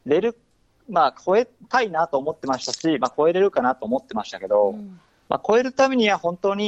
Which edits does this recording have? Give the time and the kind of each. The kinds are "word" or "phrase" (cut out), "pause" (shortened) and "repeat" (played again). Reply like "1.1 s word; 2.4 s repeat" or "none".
none